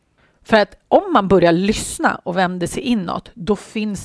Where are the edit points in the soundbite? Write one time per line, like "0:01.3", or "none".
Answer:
none